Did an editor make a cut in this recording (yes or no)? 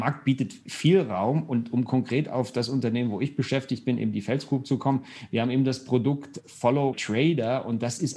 yes